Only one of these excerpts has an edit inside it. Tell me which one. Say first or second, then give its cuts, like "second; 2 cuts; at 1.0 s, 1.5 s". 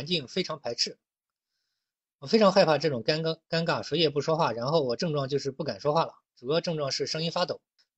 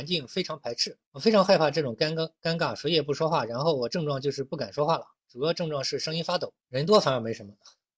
second; 2 cuts; at 1.1 s, 6.6 s